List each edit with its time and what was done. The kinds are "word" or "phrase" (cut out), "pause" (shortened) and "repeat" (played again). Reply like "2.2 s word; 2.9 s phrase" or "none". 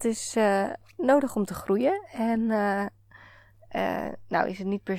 none